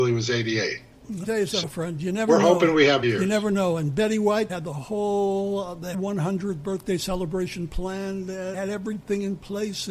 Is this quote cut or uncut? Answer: cut